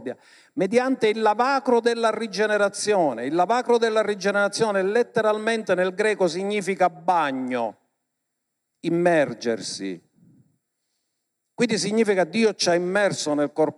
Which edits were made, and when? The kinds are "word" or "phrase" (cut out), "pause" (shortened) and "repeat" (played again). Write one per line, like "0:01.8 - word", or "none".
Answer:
none